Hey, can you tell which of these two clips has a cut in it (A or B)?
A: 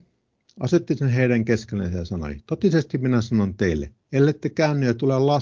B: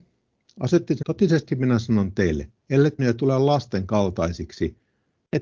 B